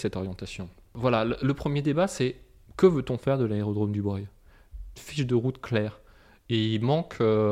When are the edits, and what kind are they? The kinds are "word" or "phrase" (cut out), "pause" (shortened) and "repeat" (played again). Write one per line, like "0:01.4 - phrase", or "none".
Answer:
0:05.0 - phrase